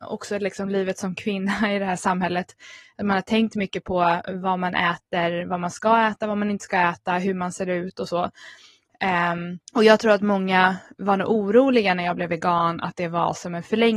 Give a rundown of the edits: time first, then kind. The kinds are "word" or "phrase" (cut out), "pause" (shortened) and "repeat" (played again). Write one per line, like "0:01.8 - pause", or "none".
0:09.7 - pause